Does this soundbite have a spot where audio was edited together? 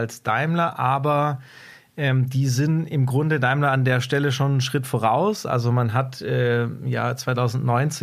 no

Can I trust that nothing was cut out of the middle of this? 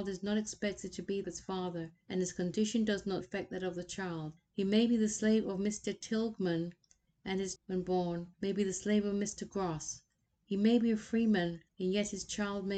no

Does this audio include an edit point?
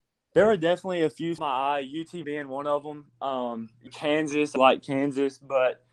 yes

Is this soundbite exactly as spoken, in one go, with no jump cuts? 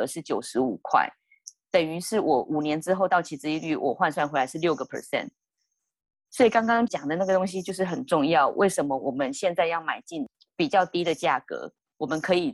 no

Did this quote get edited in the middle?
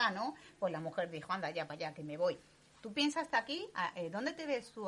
no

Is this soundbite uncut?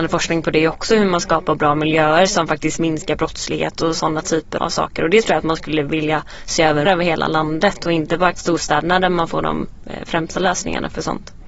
no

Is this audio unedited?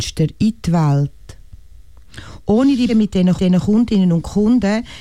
no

